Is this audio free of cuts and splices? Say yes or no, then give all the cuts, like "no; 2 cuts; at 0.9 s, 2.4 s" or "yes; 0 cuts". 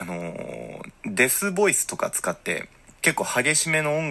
no; 1 cut; at 1.0 s